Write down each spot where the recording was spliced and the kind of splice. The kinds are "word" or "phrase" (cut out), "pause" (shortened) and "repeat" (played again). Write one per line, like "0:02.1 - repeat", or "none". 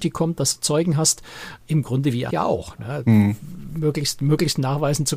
0:02.3 - word